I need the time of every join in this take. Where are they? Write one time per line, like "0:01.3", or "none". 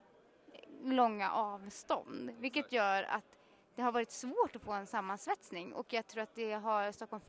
none